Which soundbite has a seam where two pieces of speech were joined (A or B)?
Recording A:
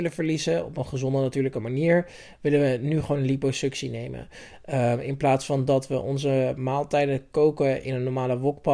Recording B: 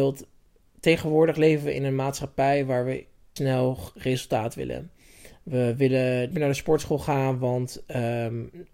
B